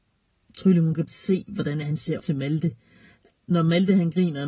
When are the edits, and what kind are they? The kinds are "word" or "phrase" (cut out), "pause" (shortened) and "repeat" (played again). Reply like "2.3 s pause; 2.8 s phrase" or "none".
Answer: 1.1 s word; 1.8 s word; 2.2 s word

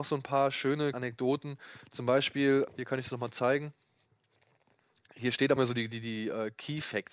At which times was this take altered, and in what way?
0.9 s word; 2.7 s word; 5.6 s word

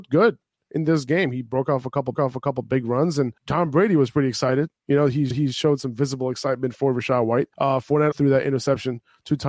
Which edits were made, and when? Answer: 2.1 s repeat; 3.4 s pause; 5.3 s repeat; 7.5 s pause; 8.1 s word

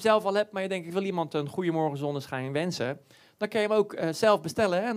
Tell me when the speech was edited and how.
none

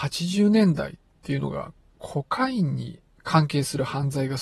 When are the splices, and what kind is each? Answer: none

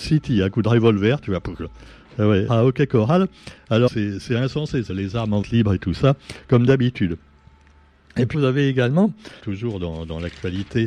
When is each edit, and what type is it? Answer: 2.5 s word; 3.9 s word; 4.9 s word; 5.4 s word; 8.3 s word; 9.4 s word

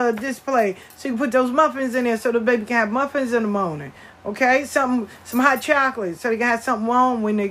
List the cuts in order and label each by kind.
none

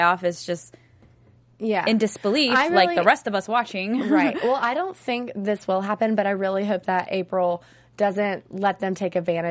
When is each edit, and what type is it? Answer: none

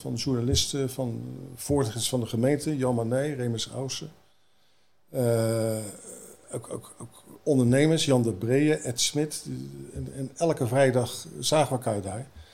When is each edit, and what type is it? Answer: none

